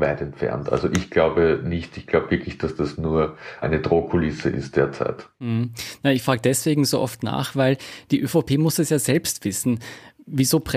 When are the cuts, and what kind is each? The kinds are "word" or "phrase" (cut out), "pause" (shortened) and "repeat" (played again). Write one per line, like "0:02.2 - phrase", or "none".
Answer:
0:05.3 - pause